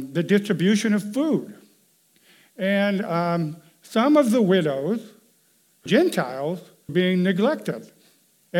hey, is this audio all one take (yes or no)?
no